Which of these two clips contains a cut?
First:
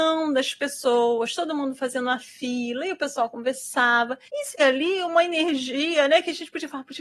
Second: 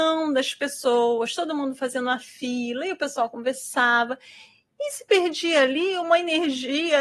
first; 2 cuts; at 4.3 s, 4.6 s

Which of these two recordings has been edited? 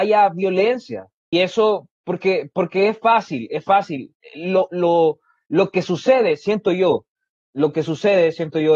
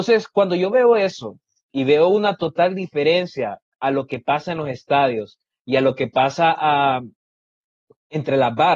first; 1 cut; at 1.3 s

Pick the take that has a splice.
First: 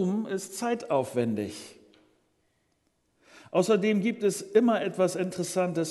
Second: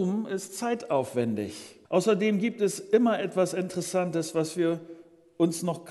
second; 1 cut; at 1.8 s

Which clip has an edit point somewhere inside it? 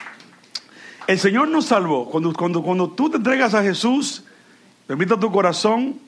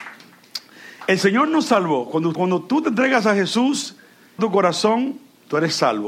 second; 2 cuts; at 2.3 s, 4.4 s

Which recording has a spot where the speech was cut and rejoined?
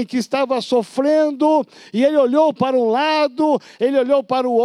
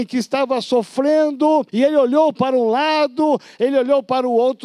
second; 1 cut; at 1.7 s

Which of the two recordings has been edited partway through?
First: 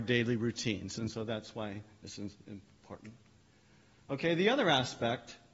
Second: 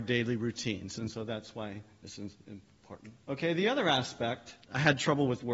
second; 2 cuts; at 3.2 s, 4.6 s

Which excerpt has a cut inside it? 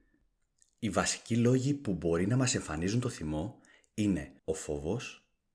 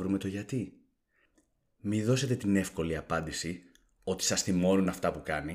first; 1 cut; at 4.4 s

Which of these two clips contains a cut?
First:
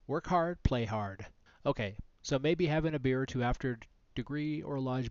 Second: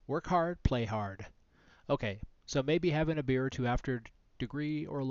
first; 1 cut; at 1.5 s

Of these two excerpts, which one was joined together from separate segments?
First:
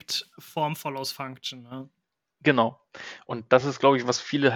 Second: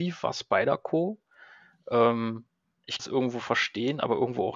second; 1 cut; at 3.0 s

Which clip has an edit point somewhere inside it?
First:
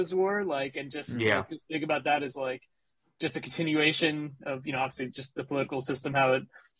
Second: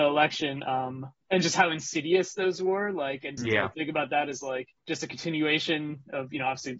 second; 3 cuts; at 3.4 s, 3.7 s, 4.8 s

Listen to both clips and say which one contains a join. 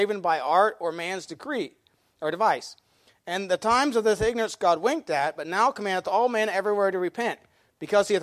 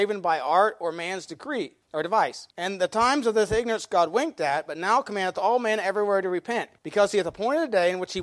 second; 3 cuts; at 1.8 s, 2.5 s, 6.8 s

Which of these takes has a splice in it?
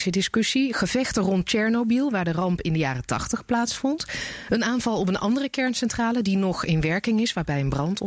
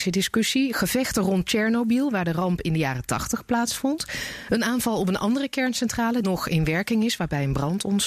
second; 1 cut; at 6.2 s

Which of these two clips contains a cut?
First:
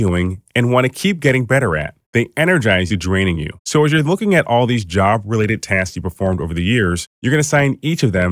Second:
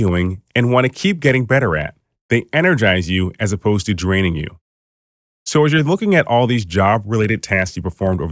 first; 4 cuts; at 2.0 s, 2.9 s, 3.6 s, 7.1 s

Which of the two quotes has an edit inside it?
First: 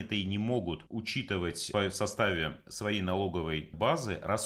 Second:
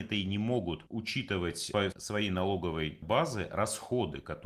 second; 1 cut; at 1.9 s

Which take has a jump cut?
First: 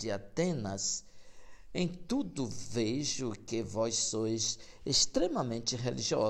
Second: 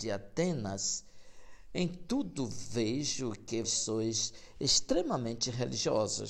second; 1 cut; at 3.6 s

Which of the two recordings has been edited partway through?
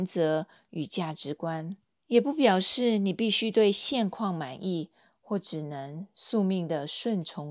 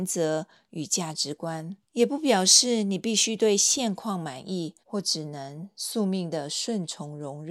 second; 2 cuts; at 1.8 s, 4.8 s

